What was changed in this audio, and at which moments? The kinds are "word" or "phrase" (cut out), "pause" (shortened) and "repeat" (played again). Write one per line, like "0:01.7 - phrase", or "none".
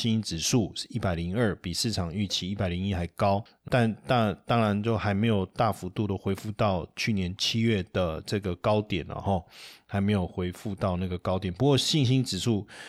0:03.7 - word

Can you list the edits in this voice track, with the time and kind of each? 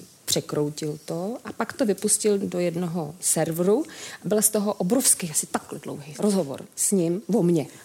none

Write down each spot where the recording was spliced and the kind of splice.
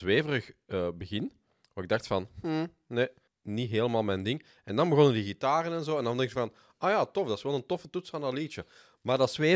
0:03.3 - pause

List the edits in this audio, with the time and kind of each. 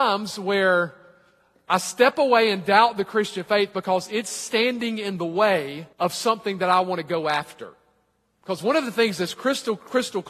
0:05.9 - pause

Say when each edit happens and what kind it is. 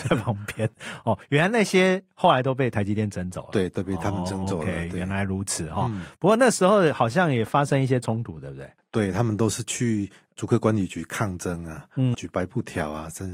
0:12.1 - word

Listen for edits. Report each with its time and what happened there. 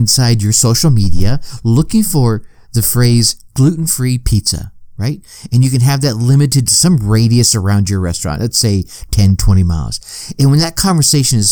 0:06.7 - word

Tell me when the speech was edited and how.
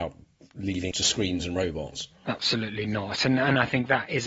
0:00.9 - word

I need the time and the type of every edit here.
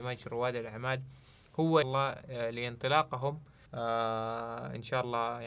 0:01.8 - phrase
0:03.7 - pause

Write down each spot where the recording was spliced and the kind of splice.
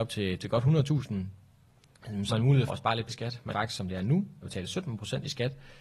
0:02.3 - word
0:02.7 - word
0:03.1 - word
0:03.5 - word
0:04.4 - word

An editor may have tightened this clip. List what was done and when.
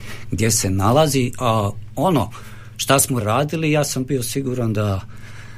0:03.2 - phrase

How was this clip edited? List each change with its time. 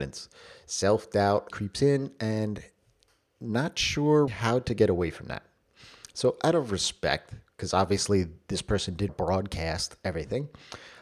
0:01.5 - word
0:04.3 - word
0:09.1 - word

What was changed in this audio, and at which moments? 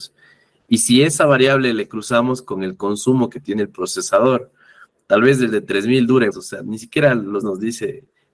0:06.3 - word
0:07.4 - word

